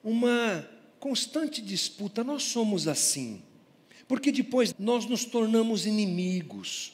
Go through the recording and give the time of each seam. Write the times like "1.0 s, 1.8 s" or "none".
4.7 s

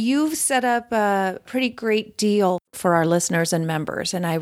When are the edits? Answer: none

